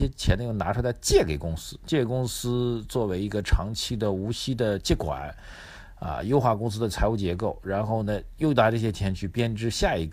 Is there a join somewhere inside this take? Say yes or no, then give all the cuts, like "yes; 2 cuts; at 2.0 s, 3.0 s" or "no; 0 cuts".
no; 0 cuts